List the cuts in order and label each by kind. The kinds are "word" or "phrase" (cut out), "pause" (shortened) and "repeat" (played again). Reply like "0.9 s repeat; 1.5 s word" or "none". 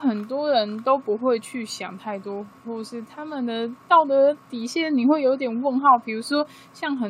4.4 s pause